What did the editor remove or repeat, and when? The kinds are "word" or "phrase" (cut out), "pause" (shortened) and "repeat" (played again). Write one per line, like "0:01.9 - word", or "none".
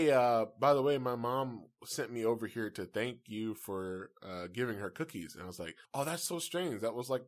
0:05.8 - pause